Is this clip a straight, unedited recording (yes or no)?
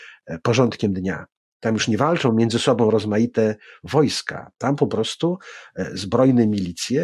yes